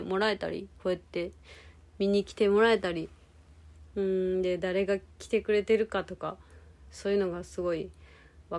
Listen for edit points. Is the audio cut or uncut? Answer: uncut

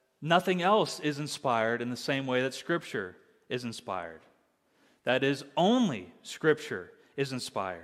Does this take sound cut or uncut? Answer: uncut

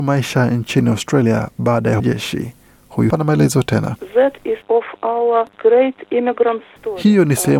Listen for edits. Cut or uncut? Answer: cut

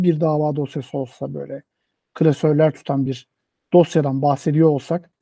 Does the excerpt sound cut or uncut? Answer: uncut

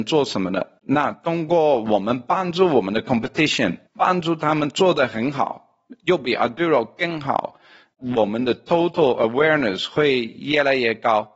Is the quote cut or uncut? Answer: cut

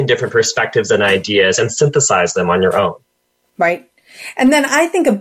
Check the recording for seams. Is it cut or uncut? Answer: uncut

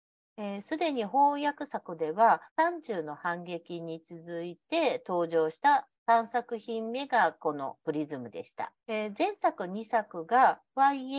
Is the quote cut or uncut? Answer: cut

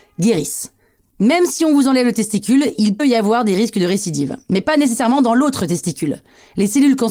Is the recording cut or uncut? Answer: cut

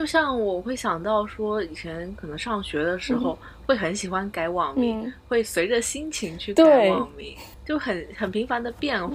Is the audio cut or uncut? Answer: cut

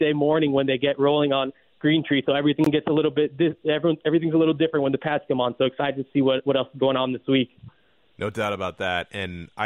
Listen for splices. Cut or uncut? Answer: uncut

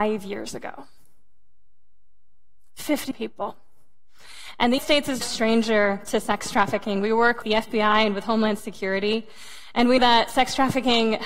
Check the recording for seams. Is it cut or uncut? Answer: cut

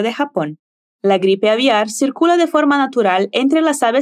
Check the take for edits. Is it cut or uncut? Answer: uncut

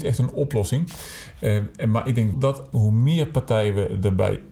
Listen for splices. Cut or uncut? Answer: cut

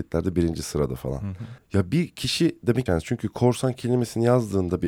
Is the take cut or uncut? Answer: cut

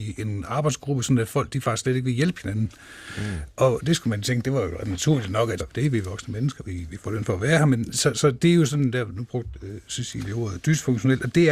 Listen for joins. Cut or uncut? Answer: cut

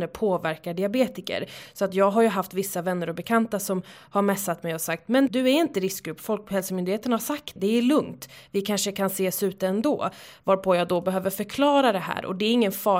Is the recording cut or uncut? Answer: cut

